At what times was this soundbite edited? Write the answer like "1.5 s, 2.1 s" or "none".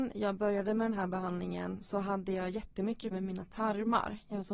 1.8 s, 3.1 s